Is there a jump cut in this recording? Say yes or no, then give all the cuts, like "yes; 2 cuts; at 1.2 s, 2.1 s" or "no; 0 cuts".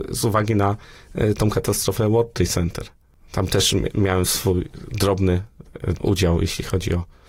yes; 1 cut; at 6.0 s